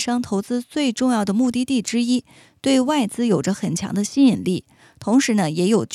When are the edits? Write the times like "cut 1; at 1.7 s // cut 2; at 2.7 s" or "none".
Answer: none